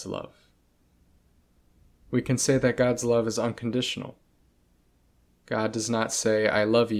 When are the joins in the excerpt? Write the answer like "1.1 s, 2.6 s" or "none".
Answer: none